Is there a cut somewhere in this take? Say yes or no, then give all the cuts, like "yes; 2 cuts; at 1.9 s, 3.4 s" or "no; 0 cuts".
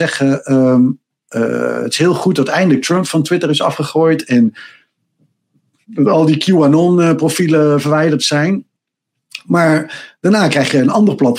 no; 0 cuts